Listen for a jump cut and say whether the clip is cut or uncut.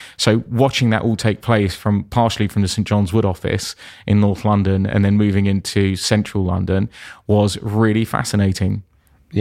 uncut